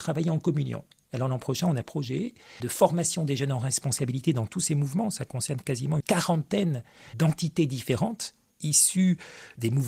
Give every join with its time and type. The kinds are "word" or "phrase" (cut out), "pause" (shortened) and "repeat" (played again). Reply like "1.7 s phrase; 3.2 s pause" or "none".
1.8 s word; 2.6 s word; 6.0 s word